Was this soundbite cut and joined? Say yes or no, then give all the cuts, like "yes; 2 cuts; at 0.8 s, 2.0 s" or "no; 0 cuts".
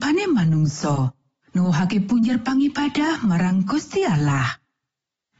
no; 0 cuts